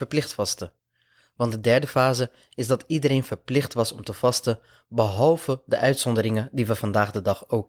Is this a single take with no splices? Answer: yes; 0 cuts

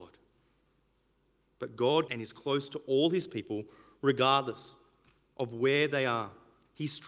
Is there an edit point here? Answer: yes; 1 cut; at 2.1 s

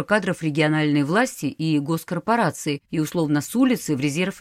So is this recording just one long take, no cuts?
no; 1 cut; at 2.9 s

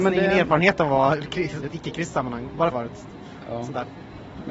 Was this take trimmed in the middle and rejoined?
yes; 2 cuts; at 1.6 s, 2.7 s

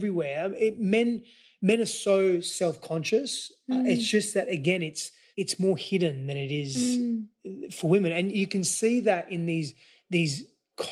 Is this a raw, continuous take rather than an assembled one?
yes; 0 cuts

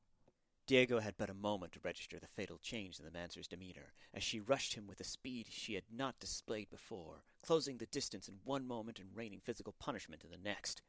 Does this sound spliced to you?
no; 0 cuts

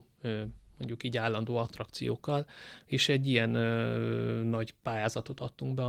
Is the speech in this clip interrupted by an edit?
no; 0 cuts

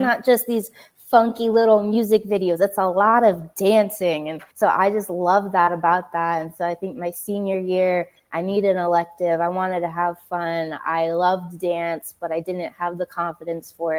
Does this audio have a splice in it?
yes; 1 cut; at 4.5 s

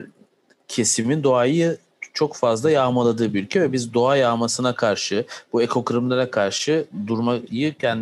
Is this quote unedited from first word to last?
yes; 0 cuts

